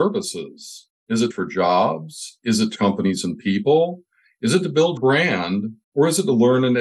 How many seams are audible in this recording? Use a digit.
3